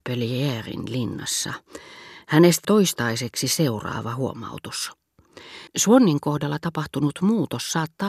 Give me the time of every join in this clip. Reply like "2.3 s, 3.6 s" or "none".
2.6 s, 5.7 s